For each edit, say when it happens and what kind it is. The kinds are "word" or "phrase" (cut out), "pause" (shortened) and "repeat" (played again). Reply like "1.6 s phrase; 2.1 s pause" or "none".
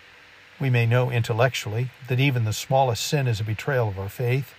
none